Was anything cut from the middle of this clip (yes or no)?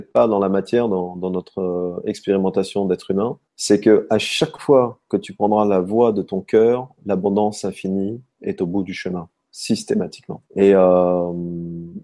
yes